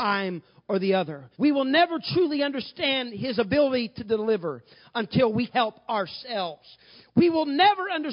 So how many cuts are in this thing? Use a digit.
2